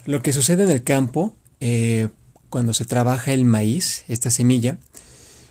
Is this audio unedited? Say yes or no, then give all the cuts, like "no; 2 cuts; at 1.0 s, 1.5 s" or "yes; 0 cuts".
yes; 0 cuts